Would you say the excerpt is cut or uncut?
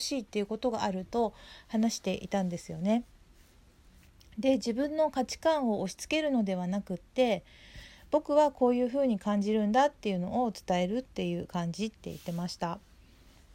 uncut